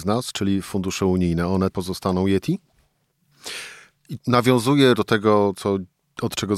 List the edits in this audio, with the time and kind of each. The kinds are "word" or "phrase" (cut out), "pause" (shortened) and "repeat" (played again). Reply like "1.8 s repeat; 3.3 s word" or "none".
1.7 s word; 4.2 s word; 4.9 s word